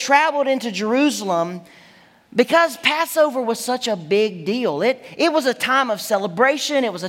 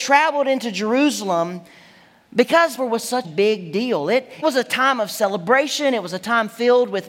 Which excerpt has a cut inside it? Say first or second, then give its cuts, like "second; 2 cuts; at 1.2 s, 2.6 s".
second; 3 cuts; at 2.8 s, 3.2 s, 4.4 s